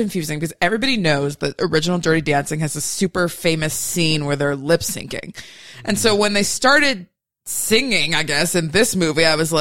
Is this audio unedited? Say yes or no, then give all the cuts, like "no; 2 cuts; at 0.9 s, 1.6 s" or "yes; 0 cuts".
yes; 0 cuts